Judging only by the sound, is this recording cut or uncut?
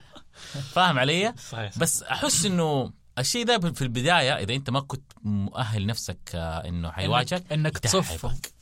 cut